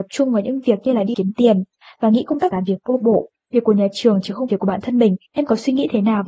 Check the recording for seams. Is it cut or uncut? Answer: cut